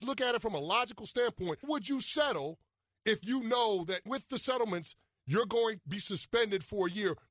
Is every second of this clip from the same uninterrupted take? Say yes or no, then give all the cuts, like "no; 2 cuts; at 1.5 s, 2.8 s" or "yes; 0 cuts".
no; 3 cuts; at 1.6 s, 4.1 s, 5.8 s